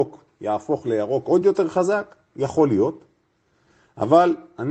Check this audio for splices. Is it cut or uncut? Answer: uncut